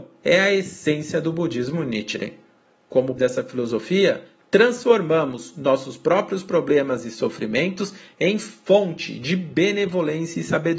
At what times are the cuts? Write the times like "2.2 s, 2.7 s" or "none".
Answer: 3.2 s